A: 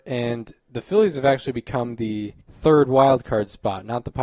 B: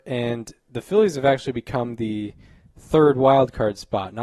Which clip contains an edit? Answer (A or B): A